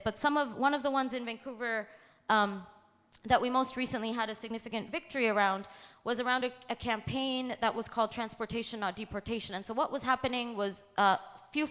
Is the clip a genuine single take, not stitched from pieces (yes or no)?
yes